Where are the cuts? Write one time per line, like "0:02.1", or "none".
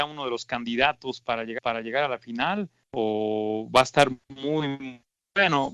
0:01.6
0:02.8